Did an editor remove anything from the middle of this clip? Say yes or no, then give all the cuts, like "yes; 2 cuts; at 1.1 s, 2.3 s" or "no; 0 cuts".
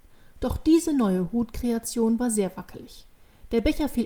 no; 0 cuts